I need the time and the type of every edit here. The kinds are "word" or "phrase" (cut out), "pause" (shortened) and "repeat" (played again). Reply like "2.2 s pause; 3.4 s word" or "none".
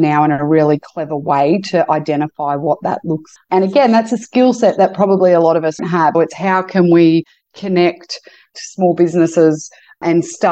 3.4 s word; 5.8 s word; 6.1 s word